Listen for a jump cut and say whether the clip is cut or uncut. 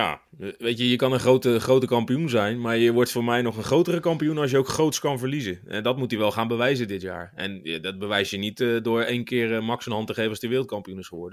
uncut